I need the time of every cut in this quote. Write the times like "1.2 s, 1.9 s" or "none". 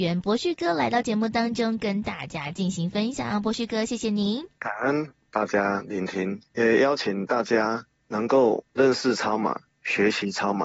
4.5 s, 6.5 s